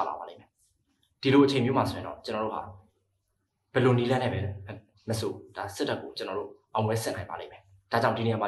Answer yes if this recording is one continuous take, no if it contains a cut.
yes